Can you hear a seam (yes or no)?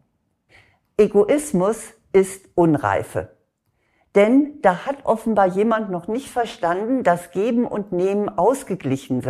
no